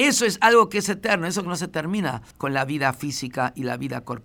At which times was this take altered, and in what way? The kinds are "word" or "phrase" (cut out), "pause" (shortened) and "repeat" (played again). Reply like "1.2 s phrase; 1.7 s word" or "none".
none